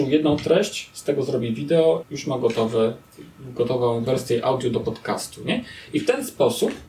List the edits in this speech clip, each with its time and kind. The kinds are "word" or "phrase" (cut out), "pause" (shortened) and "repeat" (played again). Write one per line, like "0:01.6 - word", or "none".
0:02.0 - word
0:04.1 - word